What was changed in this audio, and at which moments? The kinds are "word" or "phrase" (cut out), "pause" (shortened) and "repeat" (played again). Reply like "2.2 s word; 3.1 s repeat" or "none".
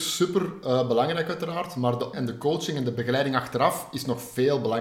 2.1 s word